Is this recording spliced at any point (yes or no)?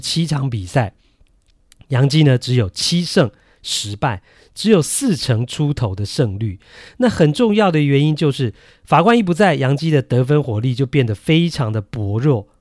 no